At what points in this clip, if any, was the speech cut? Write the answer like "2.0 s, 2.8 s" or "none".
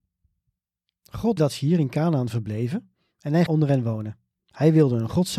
1.4 s, 3.5 s